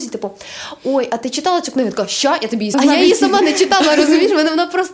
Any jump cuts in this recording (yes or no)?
yes